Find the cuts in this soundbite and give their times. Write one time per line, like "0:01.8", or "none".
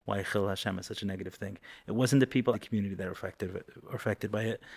0:02.5